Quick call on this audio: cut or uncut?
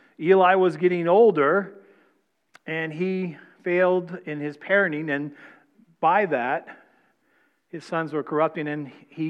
uncut